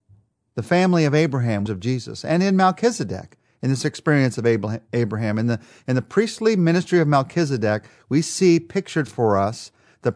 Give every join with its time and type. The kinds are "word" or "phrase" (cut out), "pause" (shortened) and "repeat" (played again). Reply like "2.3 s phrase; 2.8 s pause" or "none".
1.7 s phrase